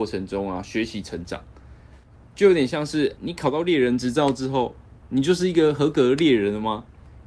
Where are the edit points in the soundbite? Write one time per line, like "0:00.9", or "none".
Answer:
0:03.2